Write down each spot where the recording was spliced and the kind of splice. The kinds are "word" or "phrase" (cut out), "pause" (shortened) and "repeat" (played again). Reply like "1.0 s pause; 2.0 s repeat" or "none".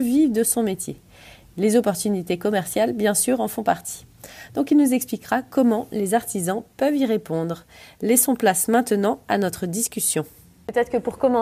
none